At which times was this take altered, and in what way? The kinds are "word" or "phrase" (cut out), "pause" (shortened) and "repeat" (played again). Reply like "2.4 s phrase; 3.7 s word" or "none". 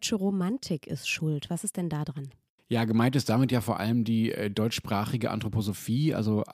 none